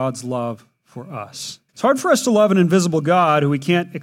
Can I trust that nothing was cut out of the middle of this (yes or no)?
no